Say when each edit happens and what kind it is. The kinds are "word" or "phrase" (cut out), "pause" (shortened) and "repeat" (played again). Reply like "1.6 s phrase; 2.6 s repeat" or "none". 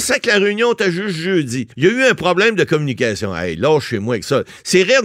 1.7 s pause